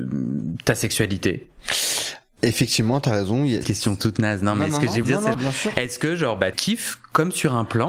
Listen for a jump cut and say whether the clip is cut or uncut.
cut